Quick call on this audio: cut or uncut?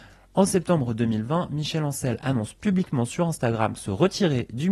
uncut